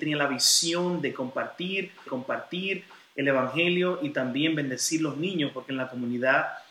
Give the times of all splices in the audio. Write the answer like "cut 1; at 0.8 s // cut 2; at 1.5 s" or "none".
cut 1; at 2.1 s